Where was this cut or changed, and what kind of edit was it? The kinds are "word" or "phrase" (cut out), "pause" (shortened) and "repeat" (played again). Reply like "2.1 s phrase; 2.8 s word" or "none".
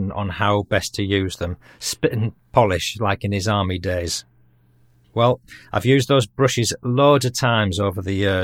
none